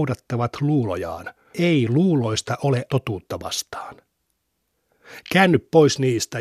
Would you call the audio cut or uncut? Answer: cut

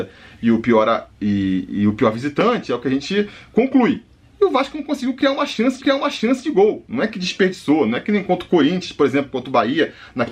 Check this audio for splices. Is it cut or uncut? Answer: cut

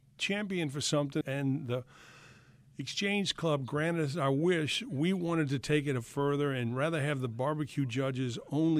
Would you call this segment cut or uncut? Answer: cut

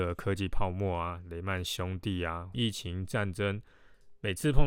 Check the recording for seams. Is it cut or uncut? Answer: cut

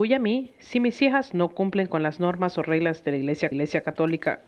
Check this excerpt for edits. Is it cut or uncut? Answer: cut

